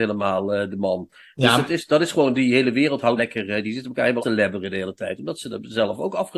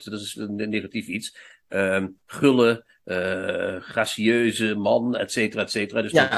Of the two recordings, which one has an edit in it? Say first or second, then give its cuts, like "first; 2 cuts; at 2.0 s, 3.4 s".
first; 2 cuts; at 3.2 s, 4.2 s